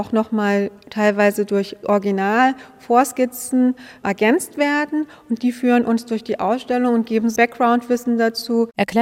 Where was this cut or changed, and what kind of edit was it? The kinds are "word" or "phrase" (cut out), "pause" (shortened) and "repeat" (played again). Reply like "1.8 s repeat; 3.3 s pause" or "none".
7.4 s word